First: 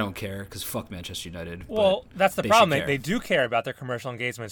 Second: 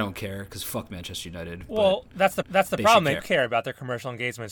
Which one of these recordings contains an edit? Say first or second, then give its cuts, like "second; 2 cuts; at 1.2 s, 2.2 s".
second; 2 cuts; at 2.4 s, 3.2 s